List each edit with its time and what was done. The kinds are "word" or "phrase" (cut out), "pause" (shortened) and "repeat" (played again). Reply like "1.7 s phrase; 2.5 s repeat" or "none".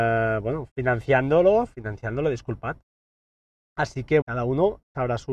4.2 s word